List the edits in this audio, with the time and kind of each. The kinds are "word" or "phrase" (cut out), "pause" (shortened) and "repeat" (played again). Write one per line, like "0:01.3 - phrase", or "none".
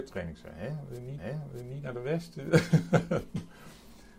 0:01.2 - repeat